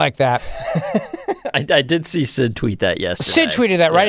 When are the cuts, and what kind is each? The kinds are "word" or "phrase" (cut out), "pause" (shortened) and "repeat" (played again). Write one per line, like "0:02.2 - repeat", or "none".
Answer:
none